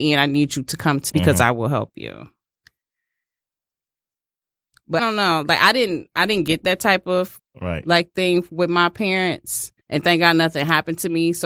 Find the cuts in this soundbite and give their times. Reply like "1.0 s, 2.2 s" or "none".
1.1 s, 5.0 s, 7.4 s, 9.8 s